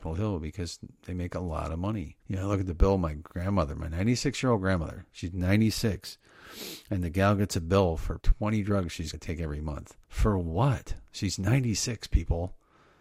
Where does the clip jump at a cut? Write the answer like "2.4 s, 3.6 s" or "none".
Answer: 2.2 s, 8.2 s, 9.1 s, 10.0 s